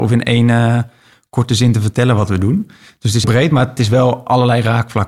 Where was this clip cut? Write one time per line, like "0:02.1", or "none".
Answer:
0:03.2